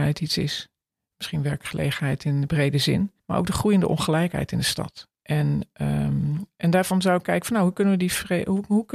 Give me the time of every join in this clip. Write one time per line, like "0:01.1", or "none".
0:03.2
0:05.1